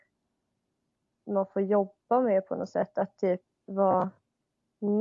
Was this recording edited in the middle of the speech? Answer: no; 0 cuts

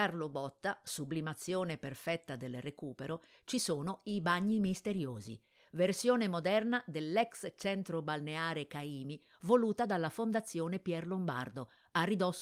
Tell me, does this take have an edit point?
no; 0 cuts

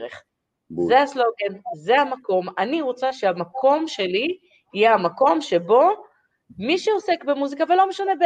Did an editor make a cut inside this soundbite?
no; 0 cuts

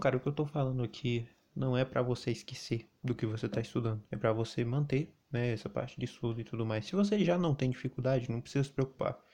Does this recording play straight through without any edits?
no; 3 cuts; at 2.9 s, 4.1 s, 5.2 s

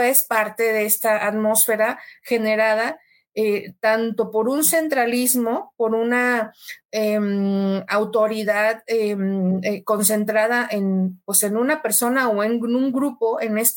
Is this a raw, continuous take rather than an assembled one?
yes; 0 cuts

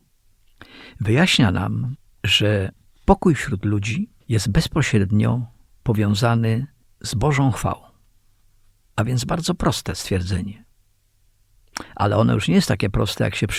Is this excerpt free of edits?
yes; 0 cuts

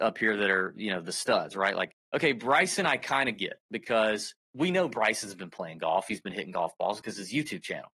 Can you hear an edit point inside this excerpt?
yes; 2 cuts; at 2.0 s, 4.4 s

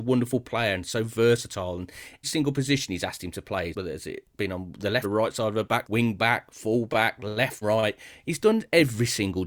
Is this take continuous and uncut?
no; 5 cuts; at 2.2 s, 3.7 s, 5.0 s, 5.8 s, 7.6 s

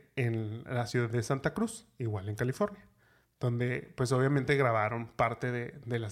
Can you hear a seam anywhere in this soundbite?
no; 0 cuts

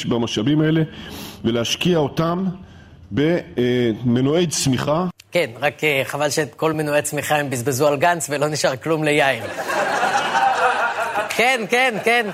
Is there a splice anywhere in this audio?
no; 0 cuts

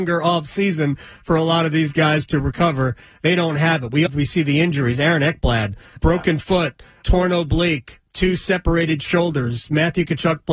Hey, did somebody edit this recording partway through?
yes; 3 cuts; at 4.1 s, 6.0 s, 7.0 s

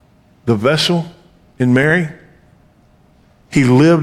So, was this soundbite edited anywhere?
no; 0 cuts

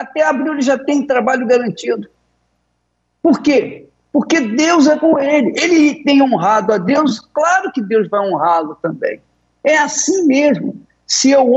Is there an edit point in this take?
no; 0 cuts

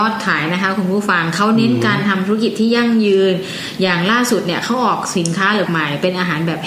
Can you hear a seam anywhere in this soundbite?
yes; 1 cut; at 5.7 s

